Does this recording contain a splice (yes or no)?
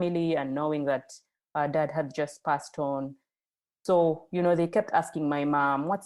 no